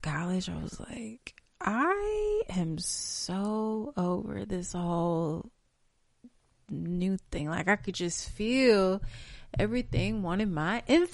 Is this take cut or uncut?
uncut